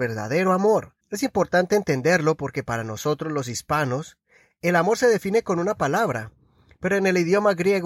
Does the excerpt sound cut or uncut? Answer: cut